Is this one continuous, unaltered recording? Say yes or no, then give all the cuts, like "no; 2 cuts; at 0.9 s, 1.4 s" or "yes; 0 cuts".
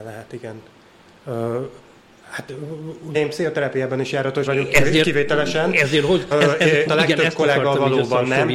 no; 4 cuts; at 3.1 s, 4.5 s, 6.3 s, 6.9 s